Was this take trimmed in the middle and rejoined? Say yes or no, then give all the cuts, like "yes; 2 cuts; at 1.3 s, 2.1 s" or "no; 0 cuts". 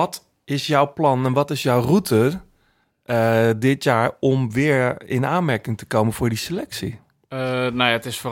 no; 0 cuts